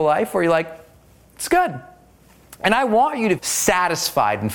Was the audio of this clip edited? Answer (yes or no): yes